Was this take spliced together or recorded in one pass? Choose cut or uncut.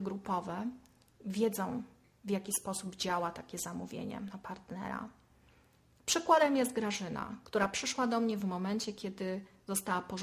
uncut